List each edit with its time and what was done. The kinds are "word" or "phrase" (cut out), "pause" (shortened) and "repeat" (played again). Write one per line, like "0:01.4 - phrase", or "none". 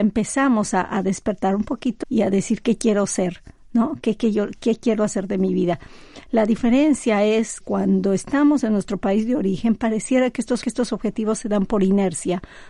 0:02.0 - word
0:07.6 - word
0:10.6 - repeat